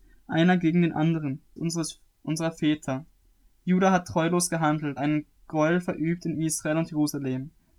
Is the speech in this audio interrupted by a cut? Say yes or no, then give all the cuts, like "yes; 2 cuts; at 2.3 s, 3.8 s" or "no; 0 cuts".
yes; 3 cuts; at 1.6 s, 5.0 s, 5.4 s